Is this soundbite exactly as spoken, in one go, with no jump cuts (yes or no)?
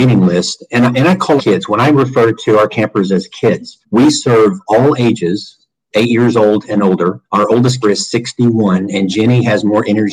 no